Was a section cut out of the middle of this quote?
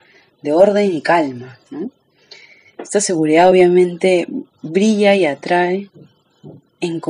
no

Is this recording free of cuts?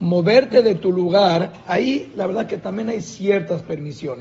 yes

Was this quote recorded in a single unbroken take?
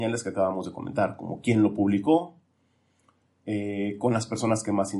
yes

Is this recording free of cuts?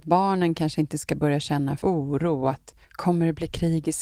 no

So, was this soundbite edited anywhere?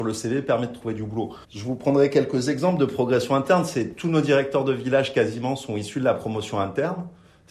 yes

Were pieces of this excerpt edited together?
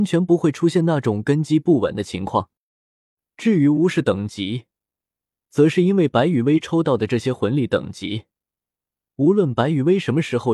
no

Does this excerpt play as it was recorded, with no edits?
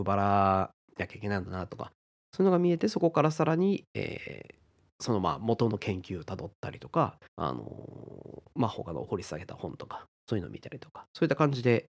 no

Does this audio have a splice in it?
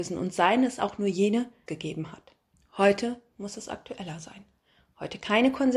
yes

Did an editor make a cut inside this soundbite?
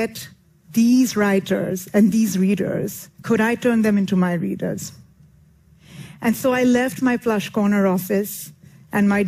yes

